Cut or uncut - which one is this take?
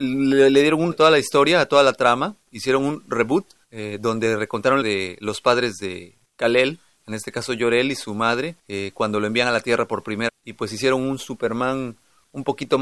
cut